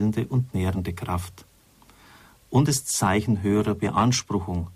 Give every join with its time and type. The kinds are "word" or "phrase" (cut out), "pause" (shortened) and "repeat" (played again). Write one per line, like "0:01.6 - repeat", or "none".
0:02.7 - word